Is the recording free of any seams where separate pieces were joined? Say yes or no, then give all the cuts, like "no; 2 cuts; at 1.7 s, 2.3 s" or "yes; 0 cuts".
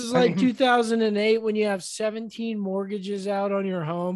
yes; 0 cuts